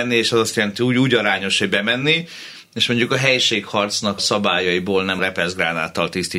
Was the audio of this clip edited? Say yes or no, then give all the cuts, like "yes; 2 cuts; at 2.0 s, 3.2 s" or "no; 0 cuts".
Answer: yes; 2 cuts; at 4.2 s, 5.2 s